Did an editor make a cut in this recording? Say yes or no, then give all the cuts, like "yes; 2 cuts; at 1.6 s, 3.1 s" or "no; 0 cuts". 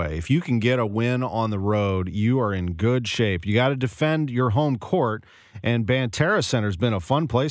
no; 0 cuts